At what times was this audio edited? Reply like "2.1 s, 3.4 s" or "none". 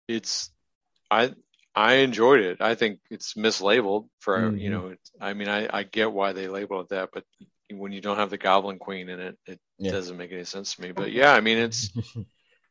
4.1 s, 7.3 s